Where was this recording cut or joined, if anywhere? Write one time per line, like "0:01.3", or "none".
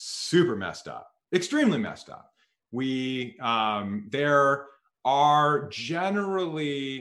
none

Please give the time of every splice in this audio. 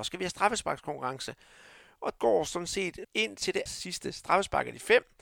0:02.2
0:03.0
0:03.7

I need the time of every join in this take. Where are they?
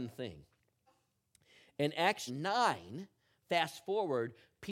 0:02.3

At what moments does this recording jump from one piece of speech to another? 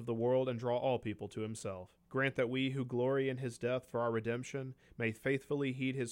0:02.0

